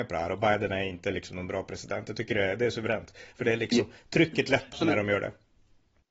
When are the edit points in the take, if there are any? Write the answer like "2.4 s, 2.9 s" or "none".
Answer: 4.7 s